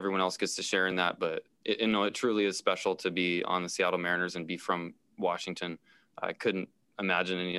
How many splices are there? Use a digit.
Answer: 0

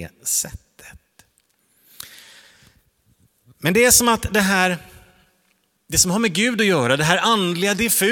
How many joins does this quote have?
0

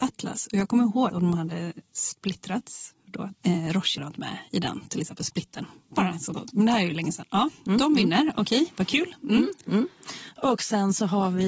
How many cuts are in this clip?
4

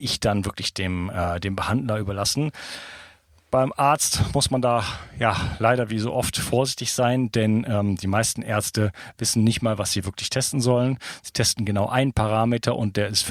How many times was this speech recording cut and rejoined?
0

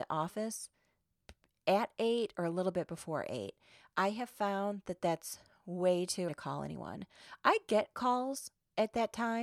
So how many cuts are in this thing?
1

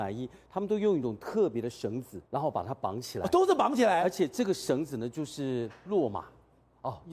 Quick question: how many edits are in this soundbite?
1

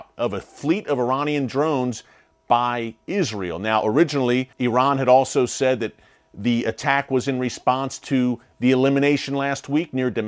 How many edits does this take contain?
1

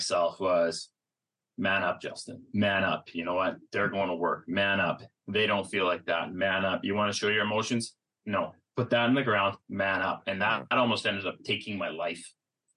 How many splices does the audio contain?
1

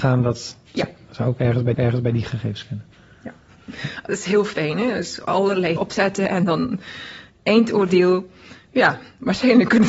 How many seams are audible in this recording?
2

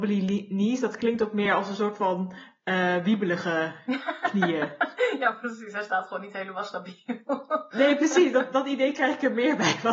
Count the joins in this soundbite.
0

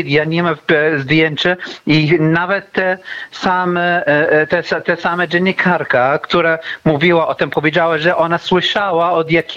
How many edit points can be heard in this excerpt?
0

